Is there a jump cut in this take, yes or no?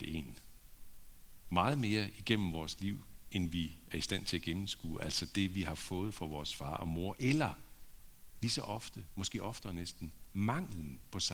no